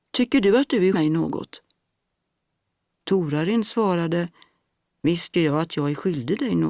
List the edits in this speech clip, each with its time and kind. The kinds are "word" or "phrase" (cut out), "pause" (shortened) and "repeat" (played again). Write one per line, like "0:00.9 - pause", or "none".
0:00.9 - word
0:05.3 - word